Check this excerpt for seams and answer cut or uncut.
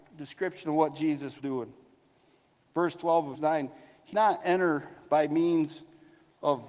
cut